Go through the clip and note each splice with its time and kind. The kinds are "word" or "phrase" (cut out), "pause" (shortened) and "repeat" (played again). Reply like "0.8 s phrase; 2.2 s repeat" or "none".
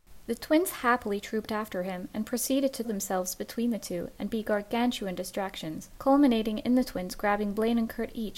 2.8 s word; 5.9 s pause